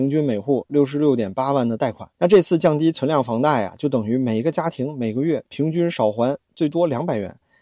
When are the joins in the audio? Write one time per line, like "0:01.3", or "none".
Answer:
0:02.1